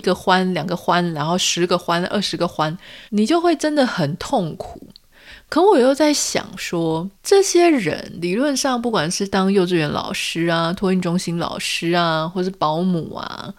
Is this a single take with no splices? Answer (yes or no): no